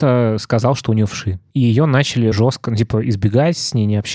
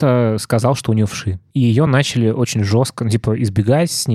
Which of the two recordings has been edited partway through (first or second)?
first